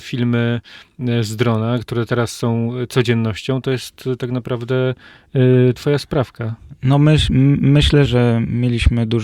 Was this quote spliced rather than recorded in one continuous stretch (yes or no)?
yes